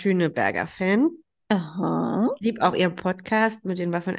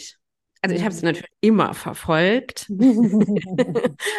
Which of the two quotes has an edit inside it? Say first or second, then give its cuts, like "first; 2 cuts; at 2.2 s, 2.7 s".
second; 1 cut; at 1.3 s